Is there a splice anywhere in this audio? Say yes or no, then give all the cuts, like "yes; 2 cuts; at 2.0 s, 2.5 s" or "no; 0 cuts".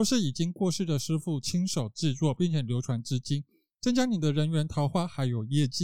no; 0 cuts